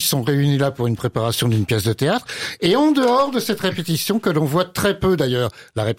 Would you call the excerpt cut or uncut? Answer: uncut